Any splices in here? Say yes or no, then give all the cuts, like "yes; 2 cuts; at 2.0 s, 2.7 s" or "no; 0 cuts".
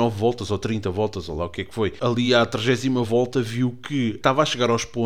no; 0 cuts